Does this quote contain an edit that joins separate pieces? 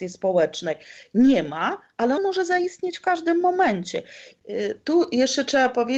yes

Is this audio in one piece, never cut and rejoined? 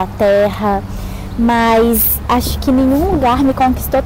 yes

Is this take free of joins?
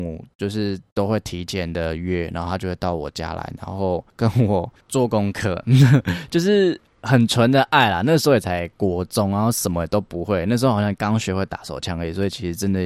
no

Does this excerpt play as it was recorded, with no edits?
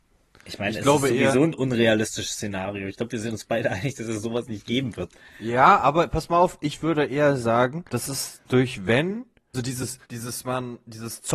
no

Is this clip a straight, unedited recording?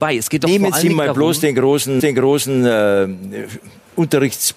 no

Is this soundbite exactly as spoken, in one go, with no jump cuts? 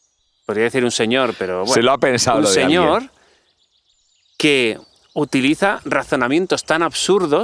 yes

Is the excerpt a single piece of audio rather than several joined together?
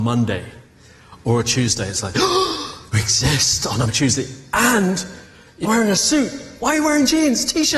no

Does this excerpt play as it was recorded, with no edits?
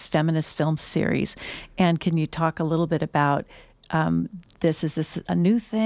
yes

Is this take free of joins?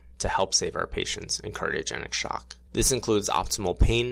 no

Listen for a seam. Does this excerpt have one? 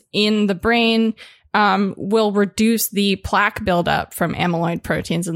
no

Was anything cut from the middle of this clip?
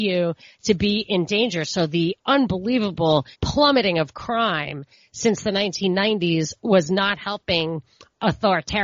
yes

